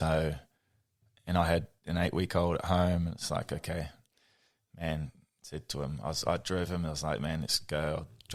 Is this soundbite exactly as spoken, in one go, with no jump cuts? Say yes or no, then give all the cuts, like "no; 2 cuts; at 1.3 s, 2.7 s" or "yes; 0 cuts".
yes; 0 cuts